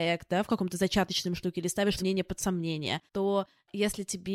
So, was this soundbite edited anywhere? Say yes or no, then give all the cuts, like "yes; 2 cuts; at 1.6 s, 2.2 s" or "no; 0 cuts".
yes; 2 cuts; at 2.0 s, 3.1 s